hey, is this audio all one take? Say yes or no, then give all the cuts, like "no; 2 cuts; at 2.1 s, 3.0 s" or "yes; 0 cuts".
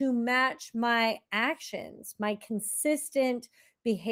yes; 0 cuts